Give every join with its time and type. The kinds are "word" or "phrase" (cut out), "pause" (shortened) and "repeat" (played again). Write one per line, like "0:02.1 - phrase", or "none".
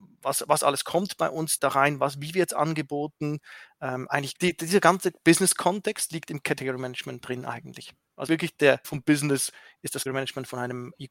0:01.6 - word
0:08.3 - word
0:08.8 - word
0:10.1 - word